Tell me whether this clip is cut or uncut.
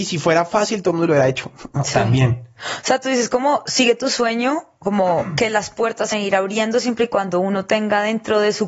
cut